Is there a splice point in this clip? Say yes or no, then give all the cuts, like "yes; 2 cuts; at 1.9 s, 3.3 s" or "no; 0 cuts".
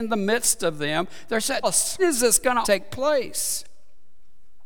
yes; 3 cuts; at 1.6 s, 2.0 s, 2.6 s